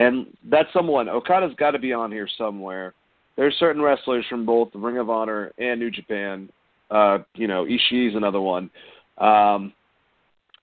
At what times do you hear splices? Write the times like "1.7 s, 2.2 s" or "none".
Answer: none